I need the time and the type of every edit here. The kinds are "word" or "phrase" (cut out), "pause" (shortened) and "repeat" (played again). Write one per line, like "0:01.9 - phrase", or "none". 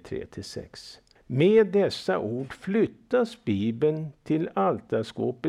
0:01.2 - pause